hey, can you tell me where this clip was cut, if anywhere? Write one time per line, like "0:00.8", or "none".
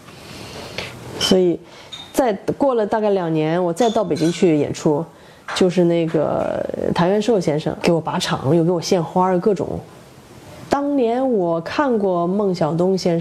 0:07.8